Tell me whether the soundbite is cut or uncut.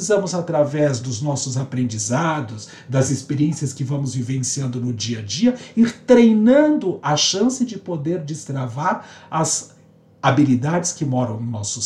uncut